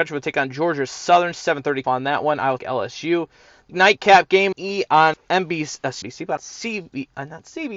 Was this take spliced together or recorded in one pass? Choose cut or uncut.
cut